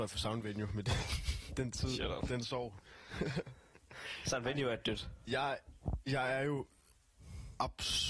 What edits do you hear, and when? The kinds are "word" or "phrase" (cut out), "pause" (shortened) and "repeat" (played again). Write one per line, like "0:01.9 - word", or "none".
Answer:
none